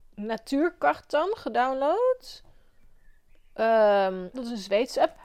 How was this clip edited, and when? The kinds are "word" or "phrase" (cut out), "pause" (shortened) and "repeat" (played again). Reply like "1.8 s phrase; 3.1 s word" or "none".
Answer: 4.3 s word